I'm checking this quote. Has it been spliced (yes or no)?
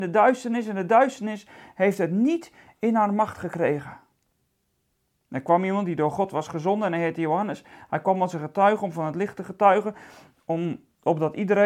no